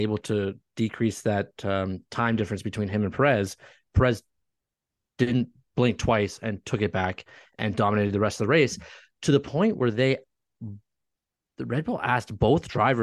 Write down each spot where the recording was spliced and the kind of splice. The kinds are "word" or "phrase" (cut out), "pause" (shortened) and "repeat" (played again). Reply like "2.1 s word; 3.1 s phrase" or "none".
none